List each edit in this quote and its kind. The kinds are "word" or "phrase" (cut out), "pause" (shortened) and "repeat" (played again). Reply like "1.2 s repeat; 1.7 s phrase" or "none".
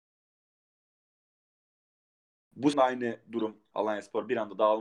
2.7 s word; 3.7 s word